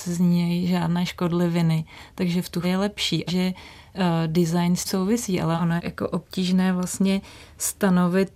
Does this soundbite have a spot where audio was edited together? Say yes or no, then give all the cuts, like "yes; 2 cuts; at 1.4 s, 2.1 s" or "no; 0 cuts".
yes; 4 cuts; at 2.6 s, 3.3 s, 4.9 s, 5.8 s